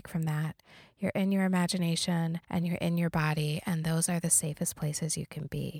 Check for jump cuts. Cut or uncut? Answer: cut